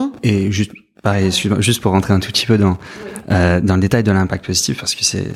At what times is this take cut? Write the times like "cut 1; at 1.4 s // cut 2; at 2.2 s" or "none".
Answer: none

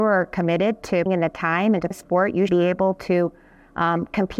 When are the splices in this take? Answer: cut 1; at 1.1 s // cut 2; at 1.9 s // cut 3; at 2.5 s

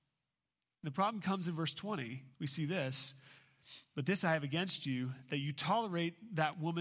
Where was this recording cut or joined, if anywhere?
cut 1; at 2.3 s

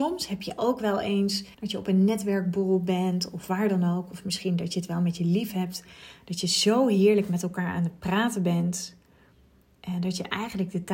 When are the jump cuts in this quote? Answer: cut 1; at 1.5 s

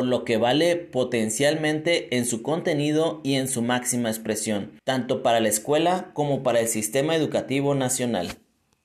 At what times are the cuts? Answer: cut 1; at 4.8 s

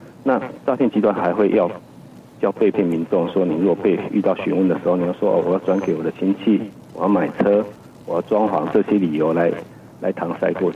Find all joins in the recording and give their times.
none

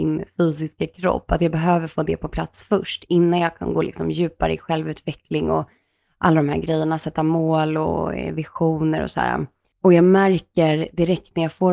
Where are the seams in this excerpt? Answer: none

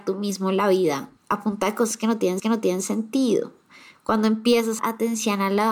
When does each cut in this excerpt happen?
cut 1; at 1.2 s // cut 2; at 2.4 s // cut 3; at 4.8 s

